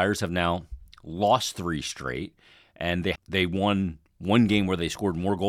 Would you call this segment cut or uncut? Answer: cut